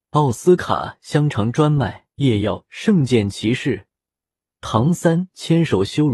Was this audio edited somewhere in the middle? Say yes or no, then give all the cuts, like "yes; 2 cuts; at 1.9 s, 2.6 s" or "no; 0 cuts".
yes; 1 cut; at 2.1 s